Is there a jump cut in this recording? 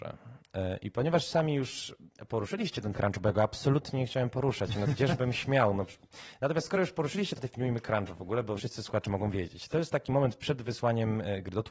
yes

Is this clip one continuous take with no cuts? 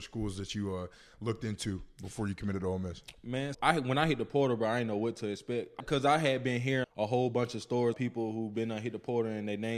no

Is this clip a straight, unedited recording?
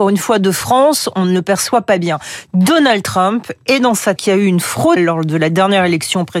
no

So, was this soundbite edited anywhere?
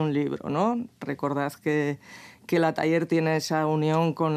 no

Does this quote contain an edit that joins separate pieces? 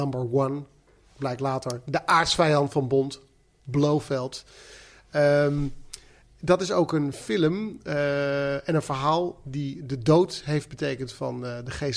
no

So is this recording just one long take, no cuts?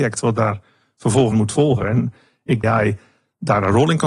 no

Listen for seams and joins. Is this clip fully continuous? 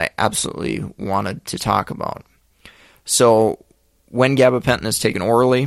yes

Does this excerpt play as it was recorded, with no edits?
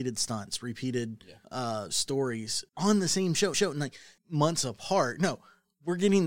no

